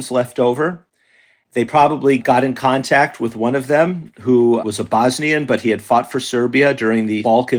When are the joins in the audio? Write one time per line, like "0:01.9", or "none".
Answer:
none

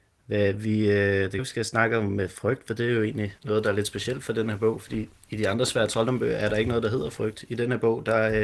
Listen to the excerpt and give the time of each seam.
0:01.4
0:03.4

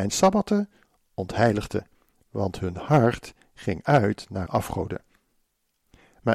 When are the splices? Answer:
0:04.5

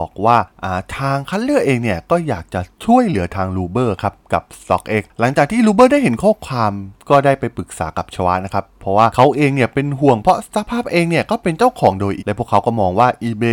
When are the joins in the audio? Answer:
0:12.2

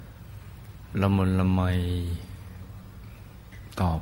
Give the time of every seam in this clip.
0:00.9

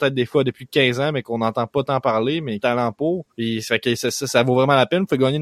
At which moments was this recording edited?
0:02.6
0:03.3

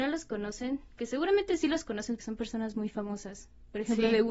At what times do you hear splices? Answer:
0:02.2

